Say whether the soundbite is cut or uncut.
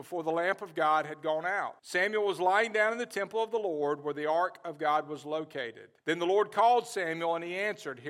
cut